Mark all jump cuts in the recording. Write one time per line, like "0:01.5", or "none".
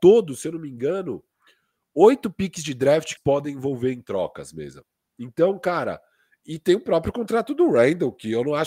0:03.2